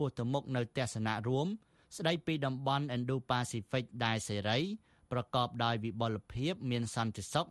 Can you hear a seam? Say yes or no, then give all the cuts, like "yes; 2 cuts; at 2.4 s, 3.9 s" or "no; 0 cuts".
no; 0 cuts